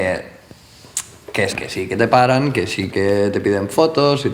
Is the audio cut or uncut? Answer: cut